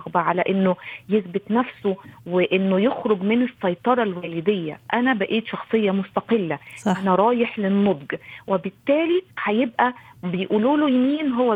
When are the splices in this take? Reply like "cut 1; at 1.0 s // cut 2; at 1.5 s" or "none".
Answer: cut 1; at 9.3 s